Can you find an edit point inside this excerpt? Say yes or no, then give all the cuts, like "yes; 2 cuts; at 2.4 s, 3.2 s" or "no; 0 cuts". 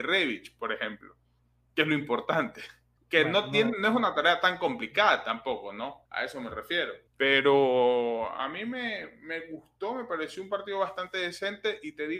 yes; 3 cuts; at 3.0 s, 6.1 s, 7.1 s